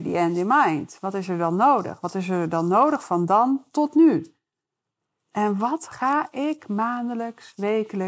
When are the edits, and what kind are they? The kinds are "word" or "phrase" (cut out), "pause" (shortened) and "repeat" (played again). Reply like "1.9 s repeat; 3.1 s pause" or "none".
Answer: none